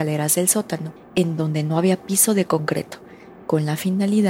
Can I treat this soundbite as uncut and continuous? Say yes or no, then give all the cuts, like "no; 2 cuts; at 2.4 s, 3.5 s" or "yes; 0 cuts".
no; 1 cut; at 1.0 s